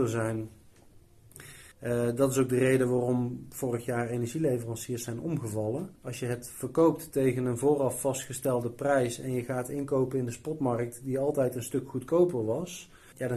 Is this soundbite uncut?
no; 2 cuts; at 1.7 s, 6.0 s

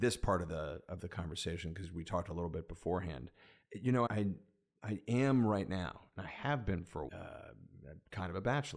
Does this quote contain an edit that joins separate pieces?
yes; 2 cuts; at 4.1 s, 7.1 s

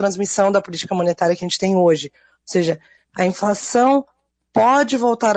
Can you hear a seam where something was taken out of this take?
no; 0 cuts

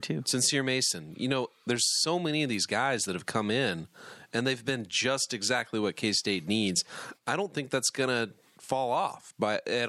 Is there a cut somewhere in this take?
no; 0 cuts

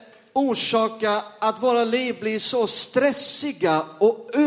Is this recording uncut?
yes; 0 cuts

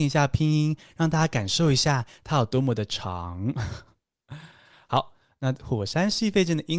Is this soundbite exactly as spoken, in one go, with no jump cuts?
yes; 0 cuts

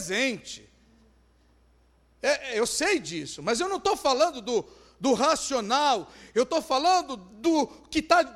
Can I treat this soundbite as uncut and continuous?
yes; 0 cuts

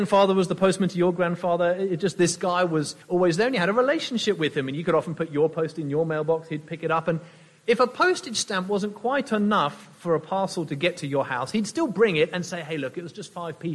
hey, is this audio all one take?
no; 1 cut; at 3.0 s

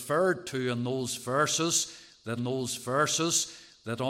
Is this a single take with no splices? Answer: no; 1 cut; at 2.4 s

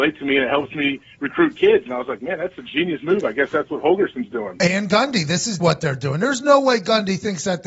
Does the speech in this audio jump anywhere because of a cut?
yes; 1 cut; at 5.6 s

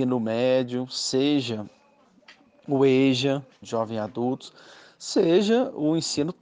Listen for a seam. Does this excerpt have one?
yes; 1 cut; at 3.6 s

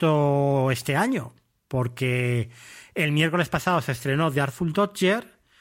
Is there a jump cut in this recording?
no; 0 cuts

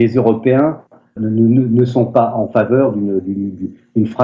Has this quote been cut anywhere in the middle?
yes; 1 cut; at 1.2 s

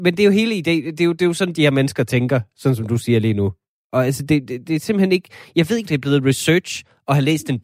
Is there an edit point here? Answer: yes; 2 cuts; at 4.6 s, 5.8 s

